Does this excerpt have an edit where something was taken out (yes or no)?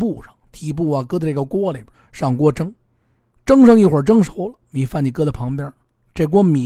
yes